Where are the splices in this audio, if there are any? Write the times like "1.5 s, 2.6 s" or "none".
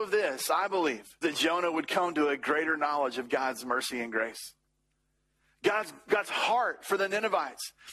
1.2 s